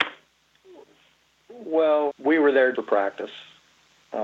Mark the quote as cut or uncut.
cut